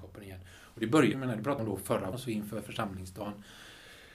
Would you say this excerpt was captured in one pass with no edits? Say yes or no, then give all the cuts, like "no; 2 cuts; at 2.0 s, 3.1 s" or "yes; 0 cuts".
no; 3 cuts; at 1.1 s, 1.6 s, 2.1 s